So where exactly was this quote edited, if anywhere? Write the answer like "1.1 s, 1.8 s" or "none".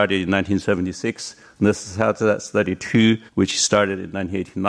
3.3 s